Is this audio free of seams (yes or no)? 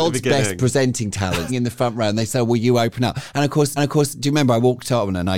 no